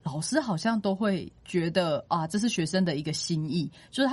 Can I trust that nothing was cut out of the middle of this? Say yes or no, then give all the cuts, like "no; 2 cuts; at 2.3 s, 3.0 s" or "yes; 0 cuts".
no; 1 cut; at 1.4 s